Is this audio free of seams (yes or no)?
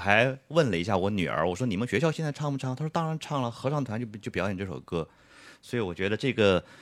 yes